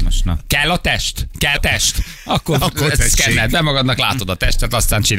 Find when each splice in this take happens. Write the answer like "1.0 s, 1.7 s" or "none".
1.6 s